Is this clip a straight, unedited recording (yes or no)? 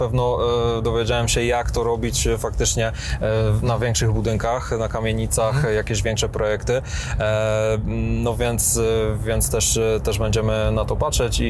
yes